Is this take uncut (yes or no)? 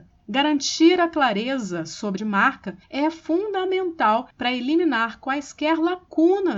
no